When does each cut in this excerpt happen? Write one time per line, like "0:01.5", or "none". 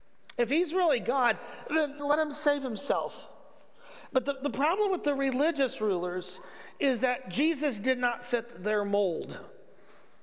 0:02.0